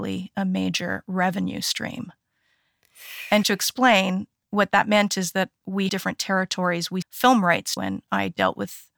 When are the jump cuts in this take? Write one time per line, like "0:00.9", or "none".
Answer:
0:03.4
0:05.9
0:07.0
0:07.8